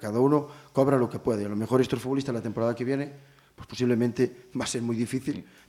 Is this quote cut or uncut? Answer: uncut